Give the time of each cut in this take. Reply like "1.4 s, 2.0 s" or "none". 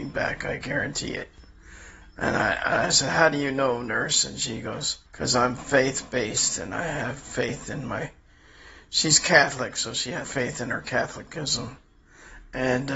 5.1 s, 10.2 s